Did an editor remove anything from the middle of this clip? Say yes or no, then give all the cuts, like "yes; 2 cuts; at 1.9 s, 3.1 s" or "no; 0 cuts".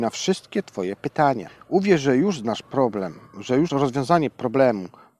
yes; 1 cut; at 3.7 s